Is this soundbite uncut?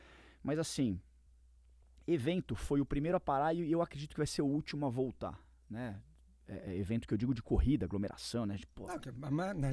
yes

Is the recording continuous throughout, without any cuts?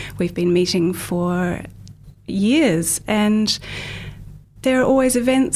yes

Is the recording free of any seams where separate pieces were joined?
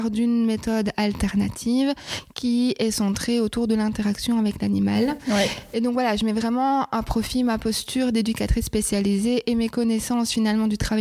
yes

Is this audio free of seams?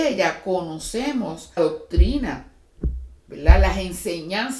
no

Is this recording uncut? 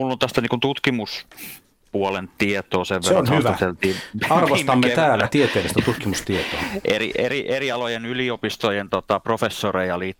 yes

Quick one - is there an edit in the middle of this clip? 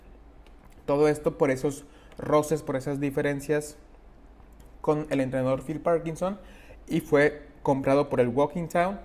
no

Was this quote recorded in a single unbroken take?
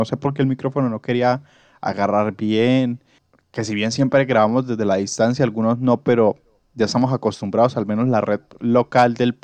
yes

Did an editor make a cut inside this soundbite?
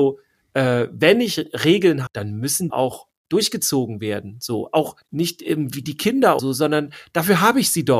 yes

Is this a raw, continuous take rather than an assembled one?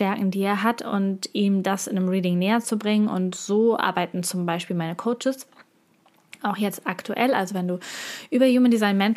yes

